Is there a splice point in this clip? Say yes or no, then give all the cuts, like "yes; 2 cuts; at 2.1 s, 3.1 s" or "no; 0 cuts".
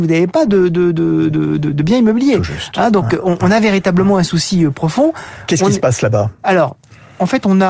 no; 0 cuts